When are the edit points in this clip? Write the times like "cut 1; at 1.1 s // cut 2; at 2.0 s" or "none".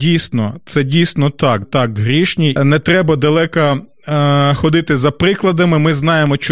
cut 1; at 1.6 s // cut 2; at 2.6 s